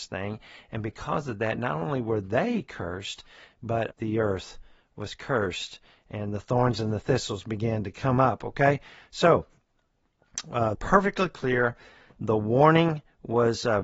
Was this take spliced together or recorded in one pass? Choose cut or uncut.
cut